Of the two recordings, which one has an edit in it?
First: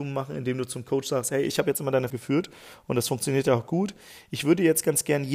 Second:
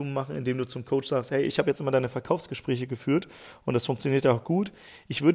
first; 1 cut; at 2.1 s

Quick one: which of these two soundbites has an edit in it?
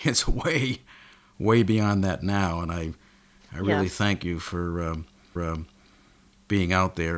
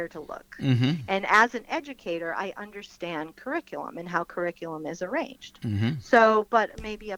first; 1 cut; at 5.4 s

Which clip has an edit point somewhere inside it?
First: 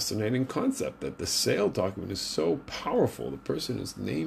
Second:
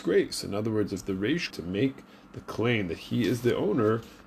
second; 1 cut; at 1.5 s

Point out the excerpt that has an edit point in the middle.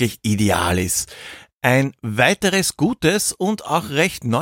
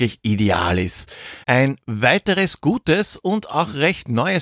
second; 1 cut; at 1.4 s

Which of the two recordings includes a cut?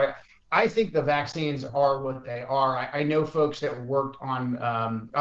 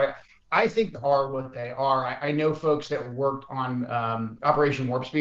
second; 1 cut; at 0.9 s

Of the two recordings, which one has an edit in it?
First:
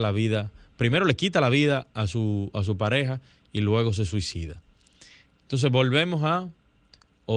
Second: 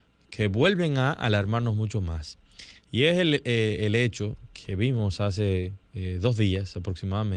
second; 1 cut; at 5.8 s

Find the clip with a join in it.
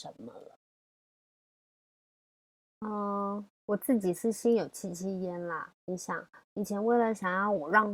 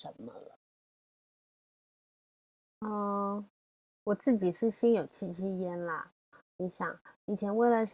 first; 2 cuts; at 3.5 s, 5.8 s

